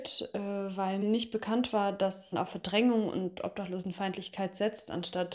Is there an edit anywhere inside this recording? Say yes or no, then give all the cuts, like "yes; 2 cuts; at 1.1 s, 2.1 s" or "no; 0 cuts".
yes; 2 cuts; at 1.0 s, 2.3 s